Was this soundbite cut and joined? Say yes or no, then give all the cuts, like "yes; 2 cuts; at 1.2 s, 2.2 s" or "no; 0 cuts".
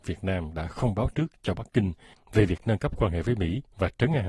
no; 0 cuts